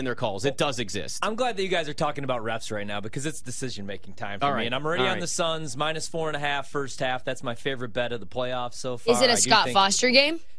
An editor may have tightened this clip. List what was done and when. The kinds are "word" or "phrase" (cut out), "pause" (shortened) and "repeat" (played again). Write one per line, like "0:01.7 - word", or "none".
none